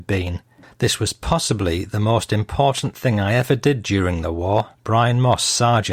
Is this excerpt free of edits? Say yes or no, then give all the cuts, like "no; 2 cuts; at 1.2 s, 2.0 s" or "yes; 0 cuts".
no; 1 cut; at 4.7 s